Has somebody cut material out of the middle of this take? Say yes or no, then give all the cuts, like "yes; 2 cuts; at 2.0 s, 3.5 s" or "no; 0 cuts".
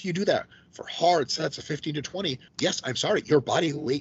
yes; 1 cut; at 2.5 s